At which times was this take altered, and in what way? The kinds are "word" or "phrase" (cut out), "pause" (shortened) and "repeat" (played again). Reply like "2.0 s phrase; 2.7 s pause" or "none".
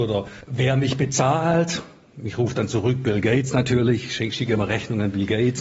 none